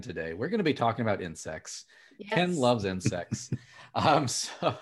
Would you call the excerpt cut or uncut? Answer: uncut